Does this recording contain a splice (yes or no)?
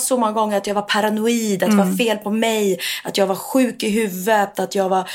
no